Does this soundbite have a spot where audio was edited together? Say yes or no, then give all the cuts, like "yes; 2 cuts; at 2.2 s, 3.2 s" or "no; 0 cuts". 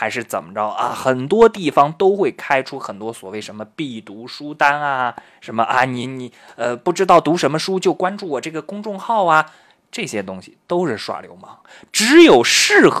no; 0 cuts